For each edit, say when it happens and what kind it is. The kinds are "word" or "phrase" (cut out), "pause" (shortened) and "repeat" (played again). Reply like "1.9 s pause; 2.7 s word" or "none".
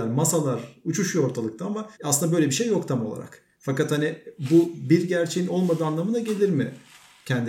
1.9 s pause; 3.5 s pause